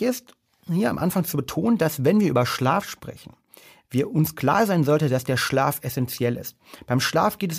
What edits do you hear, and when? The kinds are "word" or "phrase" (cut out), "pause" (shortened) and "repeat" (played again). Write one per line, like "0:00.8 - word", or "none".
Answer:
none

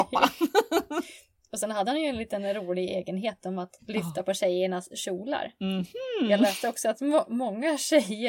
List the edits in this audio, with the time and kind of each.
0:03.8 - pause

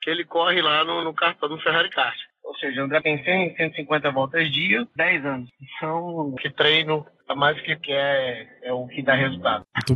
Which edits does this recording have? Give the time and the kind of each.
0:01.0 - word
0:03.0 - word
0:05.0 - word
0:06.4 - word
0:07.8 - word

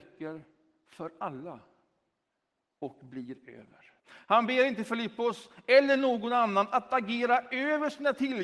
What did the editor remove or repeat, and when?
0:04.0 - pause

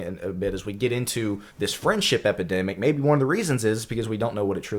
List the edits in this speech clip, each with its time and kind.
0:01.5 - pause

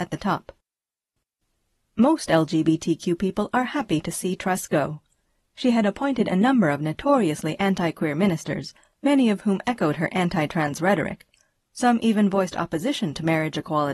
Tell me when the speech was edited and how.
none

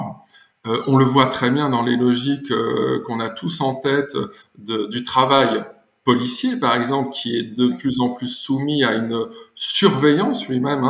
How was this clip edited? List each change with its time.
0:04.4 - word

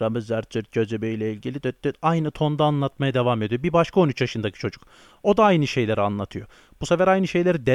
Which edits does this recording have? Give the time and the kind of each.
0:01.6 - word

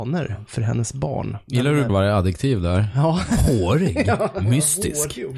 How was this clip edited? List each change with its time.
0:01.9 - word

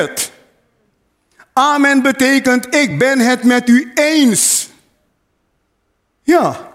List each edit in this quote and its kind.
none

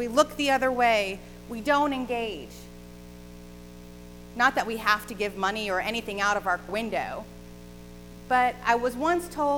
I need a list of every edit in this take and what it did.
0:06.7 - word

